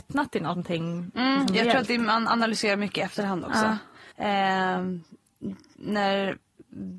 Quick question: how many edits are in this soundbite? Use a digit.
1